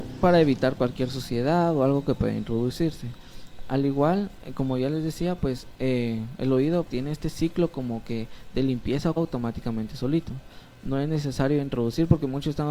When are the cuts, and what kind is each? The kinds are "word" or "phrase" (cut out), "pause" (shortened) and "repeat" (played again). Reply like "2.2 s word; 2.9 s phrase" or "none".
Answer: 6.9 s word; 9.2 s word